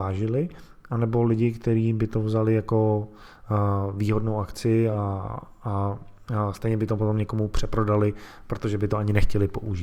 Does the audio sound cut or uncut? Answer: uncut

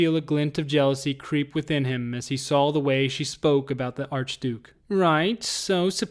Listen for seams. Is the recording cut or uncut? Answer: cut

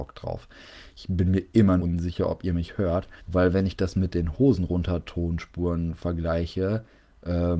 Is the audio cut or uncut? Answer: cut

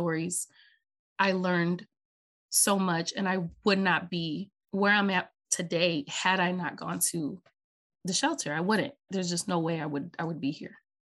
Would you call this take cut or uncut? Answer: cut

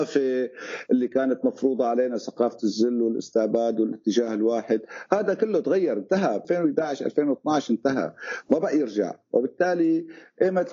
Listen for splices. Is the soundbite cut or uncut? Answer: cut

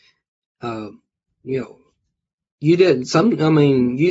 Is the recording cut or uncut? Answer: uncut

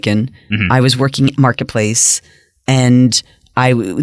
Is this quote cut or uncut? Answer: cut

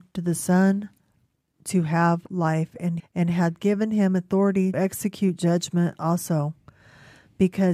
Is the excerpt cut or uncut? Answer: cut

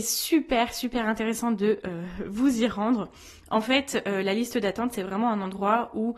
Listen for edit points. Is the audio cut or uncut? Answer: uncut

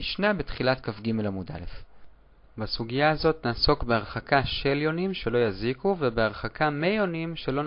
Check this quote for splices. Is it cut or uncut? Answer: uncut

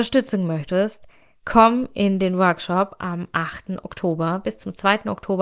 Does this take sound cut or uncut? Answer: uncut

